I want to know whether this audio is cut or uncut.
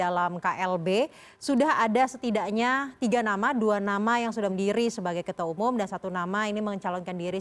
cut